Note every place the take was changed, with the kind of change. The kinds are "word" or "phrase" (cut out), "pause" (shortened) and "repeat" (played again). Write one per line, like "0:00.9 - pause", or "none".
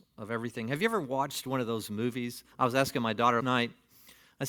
0:02.5 - pause
0:03.4 - word